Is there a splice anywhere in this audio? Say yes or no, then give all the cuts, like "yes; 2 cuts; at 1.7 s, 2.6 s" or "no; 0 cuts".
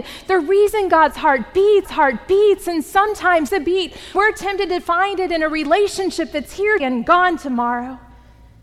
yes; 4 cuts; at 1.9 s, 3.5 s, 4.1 s, 6.8 s